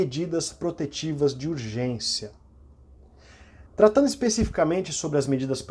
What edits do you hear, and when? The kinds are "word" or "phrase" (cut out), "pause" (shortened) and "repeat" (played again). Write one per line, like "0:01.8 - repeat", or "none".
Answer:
0:03.7 - pause